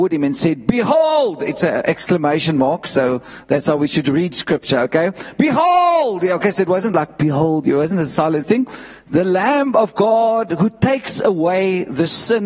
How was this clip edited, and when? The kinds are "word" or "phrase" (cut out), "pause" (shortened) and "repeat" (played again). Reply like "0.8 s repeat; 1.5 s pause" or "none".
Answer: none

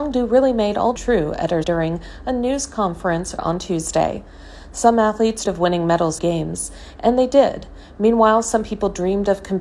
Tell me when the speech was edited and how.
1.0 s phrase; 1.6 s word; 3.4 s word; 5.5 s word; 6.2 s phrase

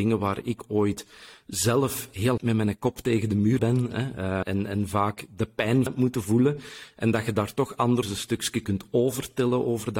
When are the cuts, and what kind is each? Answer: 2.4 s word; 3.6 s word; 4.4 s word; 5.9 s word; 8.0 s word

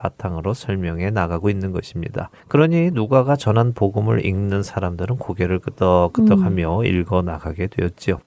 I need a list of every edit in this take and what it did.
2.4 s pause

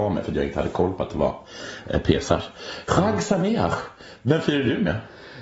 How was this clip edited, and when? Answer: none

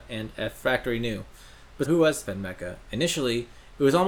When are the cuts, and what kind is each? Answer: 1.8 s word; 2.3 s word

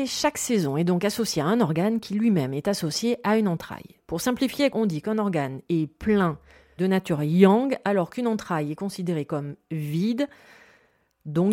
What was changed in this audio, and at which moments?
4.7 s word; 6.8 s word

